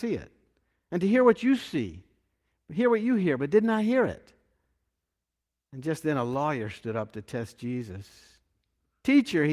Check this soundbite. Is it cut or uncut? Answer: uncut